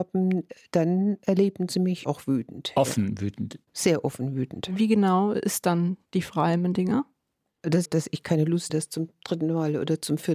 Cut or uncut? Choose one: cut